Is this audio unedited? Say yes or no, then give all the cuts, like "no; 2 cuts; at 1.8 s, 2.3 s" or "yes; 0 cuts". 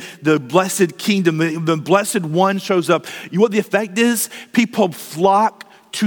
yes; 0 cuts